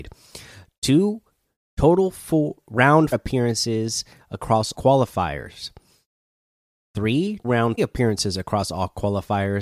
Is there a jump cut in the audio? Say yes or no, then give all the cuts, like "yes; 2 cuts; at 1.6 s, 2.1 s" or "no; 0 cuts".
yes; 4 cuts; at 3.1 s, 4.7 s, 7.4 s, 7.8 s